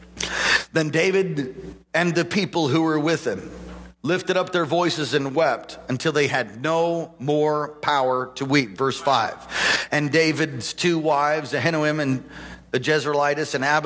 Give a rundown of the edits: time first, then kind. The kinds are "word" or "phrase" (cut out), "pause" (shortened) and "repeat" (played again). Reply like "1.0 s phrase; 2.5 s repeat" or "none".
none